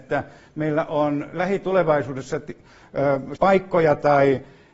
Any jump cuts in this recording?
yes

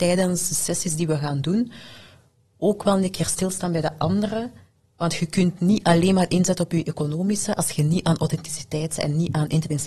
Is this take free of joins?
yes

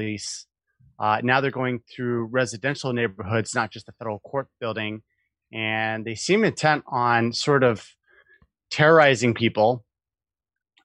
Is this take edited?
no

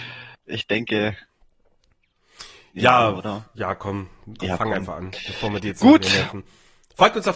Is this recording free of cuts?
no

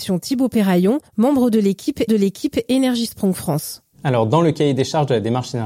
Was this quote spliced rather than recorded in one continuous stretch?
yes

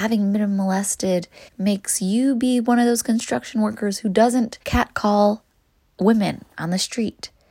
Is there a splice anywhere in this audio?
yes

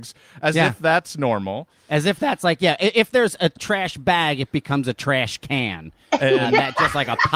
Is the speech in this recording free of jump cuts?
yes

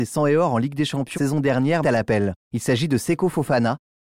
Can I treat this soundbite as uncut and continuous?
no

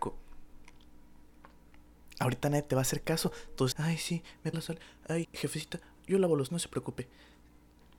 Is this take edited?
yes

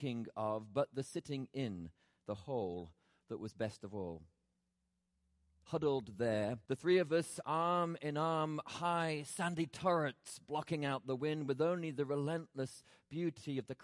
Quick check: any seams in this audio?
yes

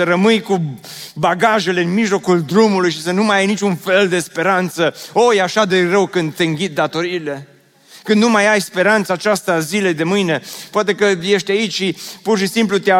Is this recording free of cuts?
yes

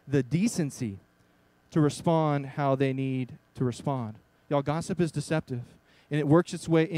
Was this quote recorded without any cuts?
yes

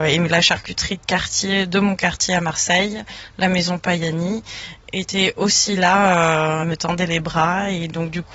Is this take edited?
yes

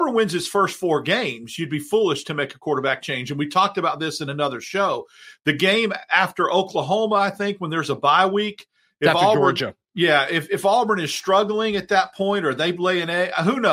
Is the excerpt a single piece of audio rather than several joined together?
yes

